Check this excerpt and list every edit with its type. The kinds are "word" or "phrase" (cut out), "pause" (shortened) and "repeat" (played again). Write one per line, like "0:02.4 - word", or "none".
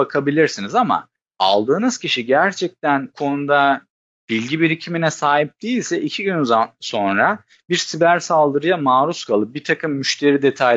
0:03.1 - word

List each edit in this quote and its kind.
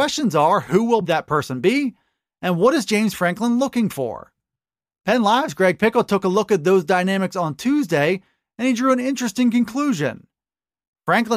none

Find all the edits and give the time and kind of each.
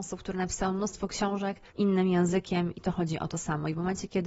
0:01.7 - pause
0:02.7 - word

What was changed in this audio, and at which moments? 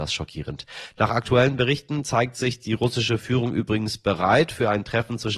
none

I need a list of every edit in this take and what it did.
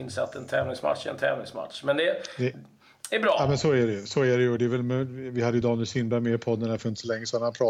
none

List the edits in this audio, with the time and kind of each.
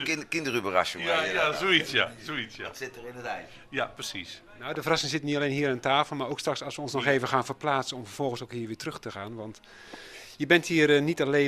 none

